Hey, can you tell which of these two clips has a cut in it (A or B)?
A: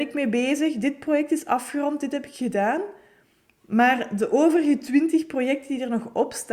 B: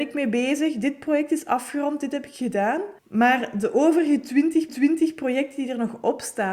B